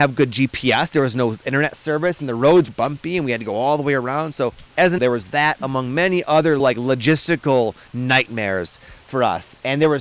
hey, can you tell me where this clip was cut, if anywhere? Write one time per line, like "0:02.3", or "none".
0:02.7
0:04.7
0:05.0
0:06.6

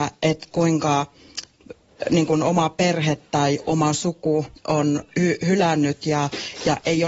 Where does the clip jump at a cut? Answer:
0:04.6

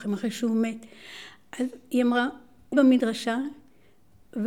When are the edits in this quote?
0:02.7

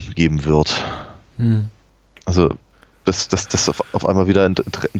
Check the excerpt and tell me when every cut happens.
0:02.7

